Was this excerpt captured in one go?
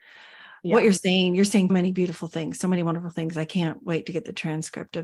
no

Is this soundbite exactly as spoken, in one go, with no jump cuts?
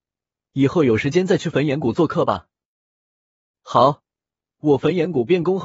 yes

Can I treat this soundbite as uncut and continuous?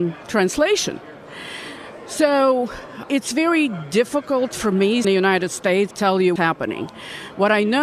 no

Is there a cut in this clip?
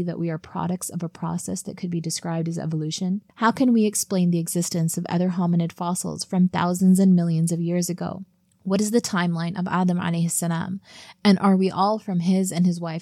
yes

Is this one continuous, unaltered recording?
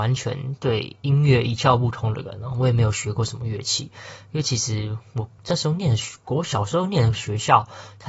no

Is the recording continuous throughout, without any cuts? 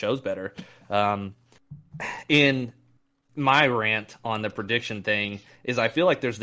yes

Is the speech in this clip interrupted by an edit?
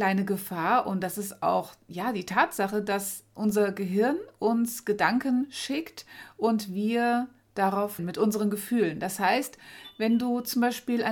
yes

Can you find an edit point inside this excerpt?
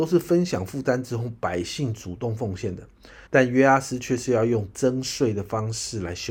yes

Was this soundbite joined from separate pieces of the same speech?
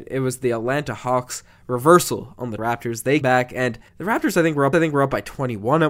yes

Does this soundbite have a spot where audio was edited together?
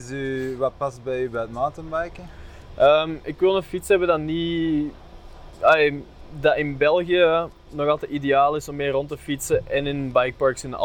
no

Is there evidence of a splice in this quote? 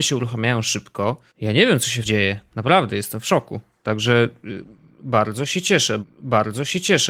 yes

